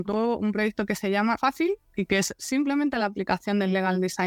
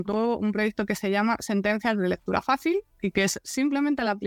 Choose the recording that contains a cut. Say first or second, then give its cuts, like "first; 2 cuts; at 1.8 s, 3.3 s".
first; 1 cut; at 1.4 s